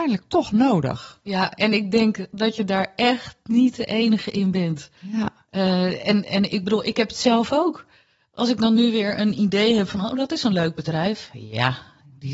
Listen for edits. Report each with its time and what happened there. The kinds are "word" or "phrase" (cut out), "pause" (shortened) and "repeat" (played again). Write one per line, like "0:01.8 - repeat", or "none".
none